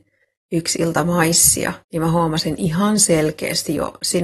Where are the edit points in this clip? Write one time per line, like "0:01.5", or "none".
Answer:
0:01.8